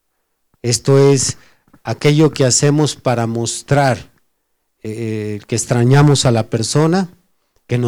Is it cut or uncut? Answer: uncut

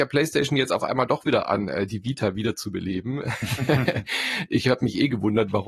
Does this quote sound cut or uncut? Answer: uncut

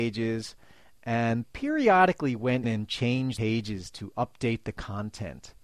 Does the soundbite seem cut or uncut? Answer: cut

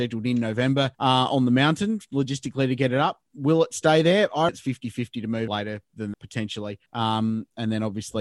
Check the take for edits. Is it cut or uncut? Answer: cut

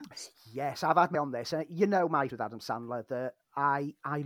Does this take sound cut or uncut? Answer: cut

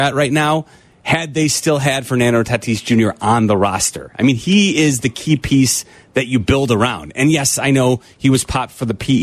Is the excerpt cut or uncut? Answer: uncut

